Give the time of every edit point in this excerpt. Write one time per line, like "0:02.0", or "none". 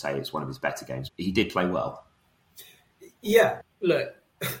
0:01.1
0:03.6